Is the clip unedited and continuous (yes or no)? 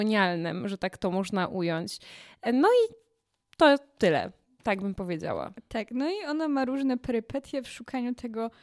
yes